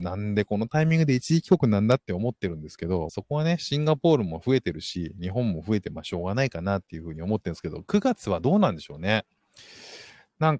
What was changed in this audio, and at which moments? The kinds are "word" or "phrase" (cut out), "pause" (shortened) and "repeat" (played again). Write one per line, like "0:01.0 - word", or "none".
0:03.1 - phrase